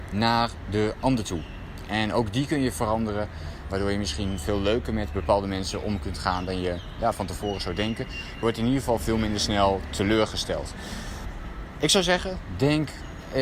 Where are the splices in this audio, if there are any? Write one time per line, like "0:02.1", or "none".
0:03.7
0:08.4